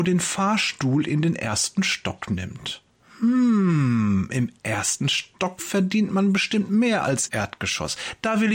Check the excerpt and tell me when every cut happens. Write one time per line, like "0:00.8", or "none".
0:02.9
0:07.3